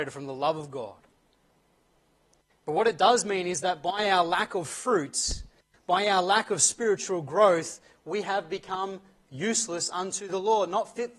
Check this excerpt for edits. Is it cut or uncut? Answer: uncut